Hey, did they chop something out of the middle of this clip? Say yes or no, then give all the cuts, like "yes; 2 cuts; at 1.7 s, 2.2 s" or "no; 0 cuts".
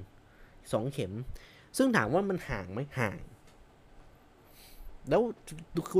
no; 0 cuts